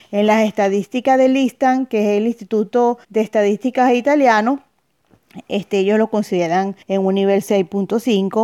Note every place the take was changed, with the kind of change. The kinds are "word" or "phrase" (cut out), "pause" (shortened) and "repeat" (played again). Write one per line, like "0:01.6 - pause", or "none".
0:03.0 - pause
0:06.8 - pause